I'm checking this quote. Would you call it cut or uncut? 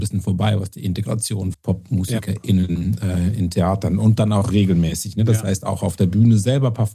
cut